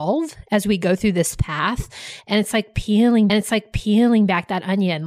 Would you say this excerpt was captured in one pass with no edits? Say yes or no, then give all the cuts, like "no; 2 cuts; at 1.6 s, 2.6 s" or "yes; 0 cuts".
no; 1 cut; at 3.3 s